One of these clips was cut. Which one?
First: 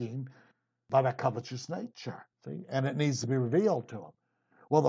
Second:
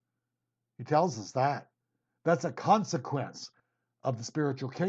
first; 1 cut; at 2.3 s

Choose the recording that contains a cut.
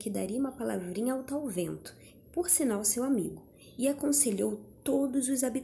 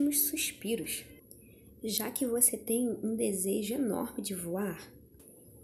first; 1 cut; at 2.2 s

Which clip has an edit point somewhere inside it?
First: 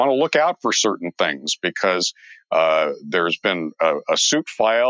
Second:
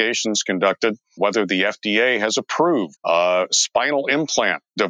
second; 2 cuts; at 1.2 s, 3.0 s

